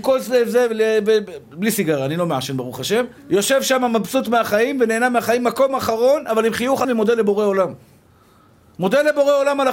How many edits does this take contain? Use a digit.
2